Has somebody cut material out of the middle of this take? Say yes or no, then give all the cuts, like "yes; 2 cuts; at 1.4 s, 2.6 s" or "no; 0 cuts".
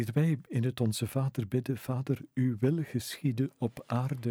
no; 0 cuts